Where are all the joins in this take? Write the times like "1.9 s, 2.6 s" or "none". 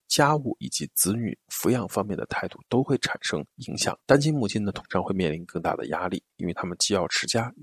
4.0 s